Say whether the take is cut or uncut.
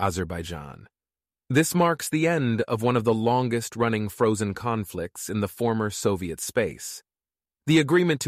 uncut